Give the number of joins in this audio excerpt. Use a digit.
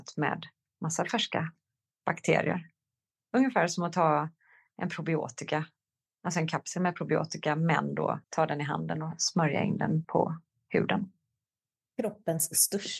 2